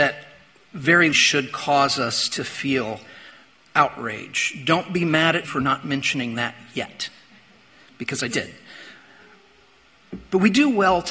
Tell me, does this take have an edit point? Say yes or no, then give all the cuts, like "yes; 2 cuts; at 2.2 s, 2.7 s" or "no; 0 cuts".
yes; 3 cuts; at 1.1 s, 5.4 s, 8.3 s